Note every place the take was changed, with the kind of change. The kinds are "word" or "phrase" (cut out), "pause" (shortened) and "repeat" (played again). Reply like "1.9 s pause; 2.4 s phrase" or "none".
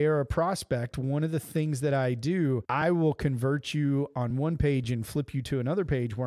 none